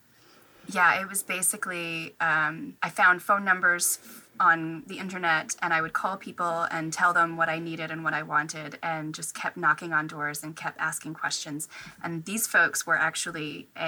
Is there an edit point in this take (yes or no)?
yes